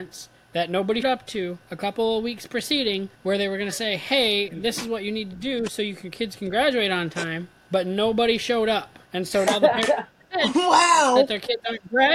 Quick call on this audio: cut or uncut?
cut